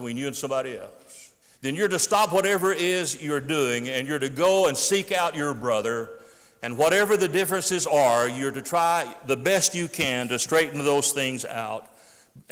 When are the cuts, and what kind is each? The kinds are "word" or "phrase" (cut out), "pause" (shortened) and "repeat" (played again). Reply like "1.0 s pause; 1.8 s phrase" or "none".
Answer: 1.4 s pause